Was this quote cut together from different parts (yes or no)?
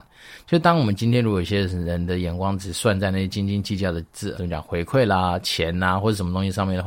yes